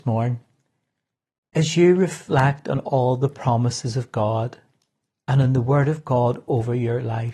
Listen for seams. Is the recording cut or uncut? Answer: uncut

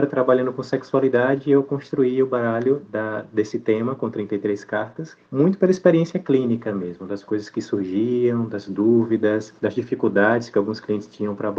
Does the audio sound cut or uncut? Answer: cut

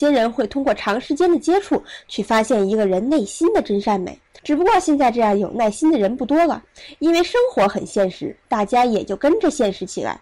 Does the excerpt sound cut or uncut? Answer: uncut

